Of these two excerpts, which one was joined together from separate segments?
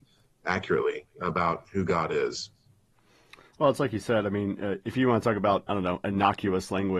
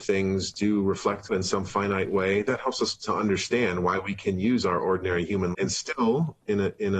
second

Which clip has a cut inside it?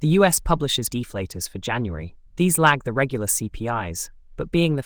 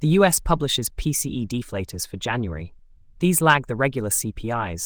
first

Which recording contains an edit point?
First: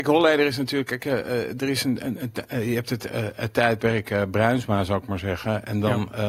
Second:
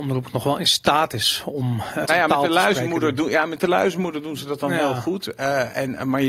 second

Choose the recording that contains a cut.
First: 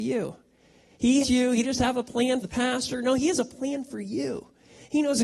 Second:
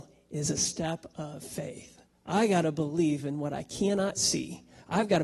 first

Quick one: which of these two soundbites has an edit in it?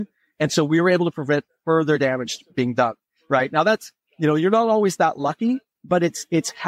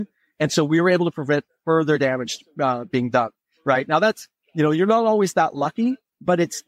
first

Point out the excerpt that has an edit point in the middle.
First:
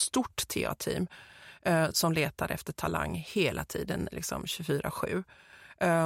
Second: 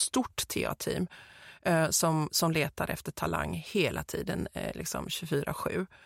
first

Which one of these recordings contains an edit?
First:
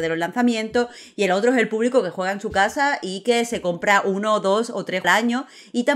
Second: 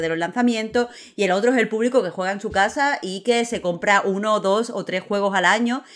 first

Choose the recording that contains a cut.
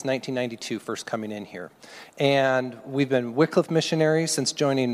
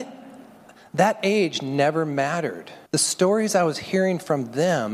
second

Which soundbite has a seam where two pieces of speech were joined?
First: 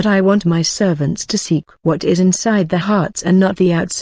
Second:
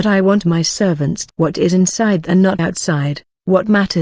second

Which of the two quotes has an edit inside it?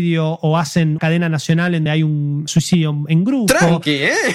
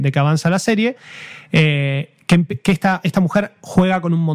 first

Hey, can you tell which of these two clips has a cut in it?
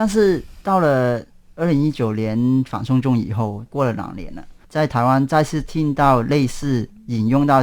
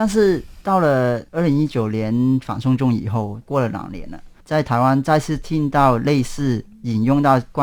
second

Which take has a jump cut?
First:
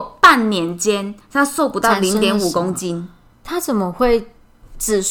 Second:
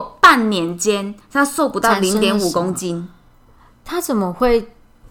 first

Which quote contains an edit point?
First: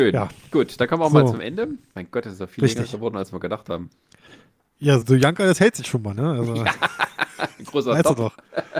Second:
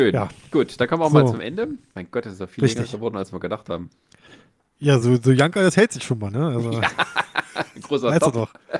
first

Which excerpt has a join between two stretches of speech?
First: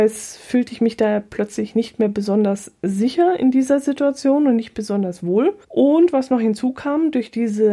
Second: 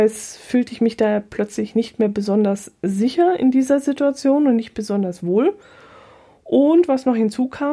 first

